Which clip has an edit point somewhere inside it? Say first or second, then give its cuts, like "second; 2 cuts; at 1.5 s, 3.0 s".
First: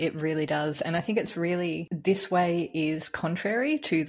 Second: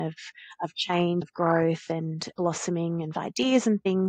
second; 2 cuts; at 1.2 s, 3.1 s